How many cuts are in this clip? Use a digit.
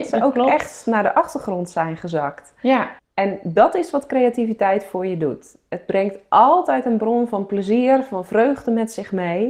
1